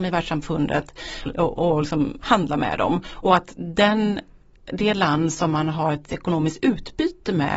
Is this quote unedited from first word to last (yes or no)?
no